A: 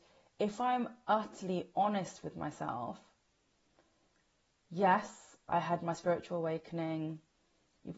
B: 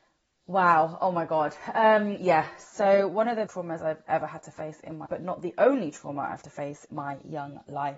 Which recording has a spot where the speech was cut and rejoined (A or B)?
B